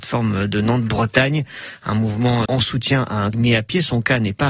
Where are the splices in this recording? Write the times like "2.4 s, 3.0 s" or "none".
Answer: 2.5 s, 3.3 s